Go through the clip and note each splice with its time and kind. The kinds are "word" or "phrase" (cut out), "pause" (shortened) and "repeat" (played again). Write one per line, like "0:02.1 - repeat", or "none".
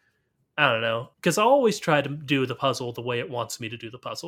0:01.1 - pause